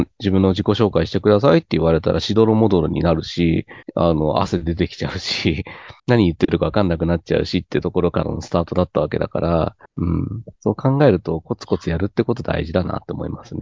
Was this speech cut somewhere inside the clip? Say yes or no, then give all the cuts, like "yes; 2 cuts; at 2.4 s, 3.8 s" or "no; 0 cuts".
yes; 4 cuts; at 3.8 s, 6.0 s, 9.8 s, 10.5 s